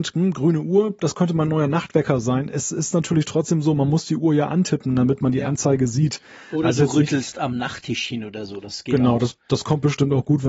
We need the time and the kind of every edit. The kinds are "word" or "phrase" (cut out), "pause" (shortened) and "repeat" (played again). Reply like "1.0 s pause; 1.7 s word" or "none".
none